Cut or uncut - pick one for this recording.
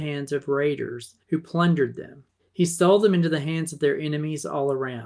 cut